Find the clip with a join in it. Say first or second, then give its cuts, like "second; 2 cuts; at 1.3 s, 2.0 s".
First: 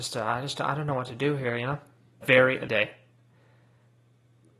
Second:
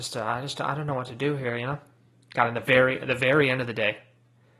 first; 2 cuts; at 2.2 s, 2.7 s